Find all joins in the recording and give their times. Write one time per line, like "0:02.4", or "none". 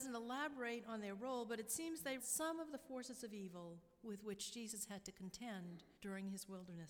0:02.2
0:06.0